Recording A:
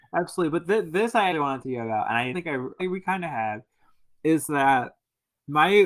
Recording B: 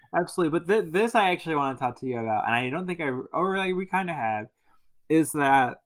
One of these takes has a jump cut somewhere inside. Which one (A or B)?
A